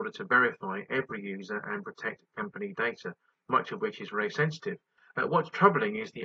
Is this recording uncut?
yes; 0 cuts

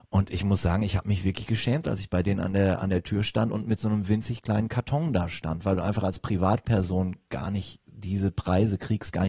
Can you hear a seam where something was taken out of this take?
no; 0 cuts

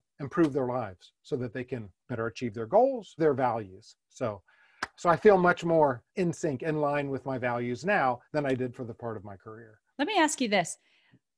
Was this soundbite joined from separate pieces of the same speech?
yes; 7 cuts; at 2.0 s, 3.2 s, 4.9 s, 6.1 s, 8.2 s, 9.0 s, 9.9 s

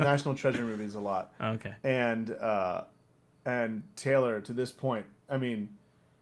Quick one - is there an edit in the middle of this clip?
no; 0 cuts

